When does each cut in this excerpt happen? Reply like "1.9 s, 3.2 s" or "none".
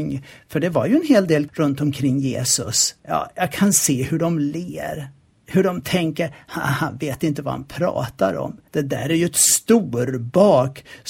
1.5 s, 3.0 s, 5.3 s, 8.7 s

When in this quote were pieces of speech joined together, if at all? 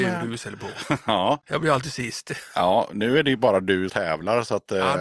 3.9 s

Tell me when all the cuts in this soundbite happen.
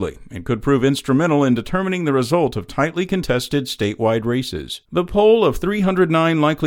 4.9 s

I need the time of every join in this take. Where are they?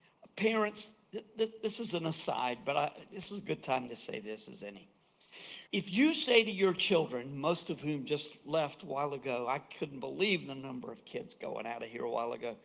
5.7 s

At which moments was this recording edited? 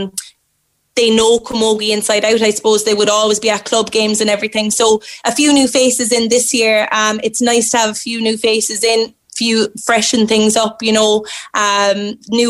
none

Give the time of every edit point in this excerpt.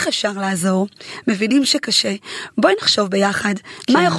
none

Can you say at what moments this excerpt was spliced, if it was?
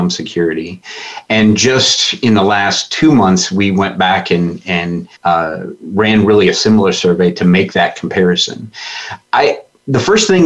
5.1 s

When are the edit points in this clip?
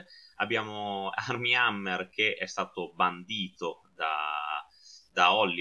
none

